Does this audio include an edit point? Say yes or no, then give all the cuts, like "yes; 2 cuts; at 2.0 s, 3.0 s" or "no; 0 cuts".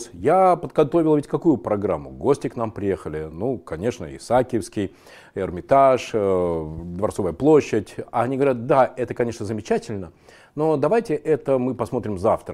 no; 0 cuts